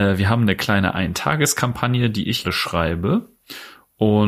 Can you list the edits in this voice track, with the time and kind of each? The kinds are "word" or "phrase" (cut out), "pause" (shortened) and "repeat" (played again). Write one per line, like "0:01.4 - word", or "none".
0:02.4 - word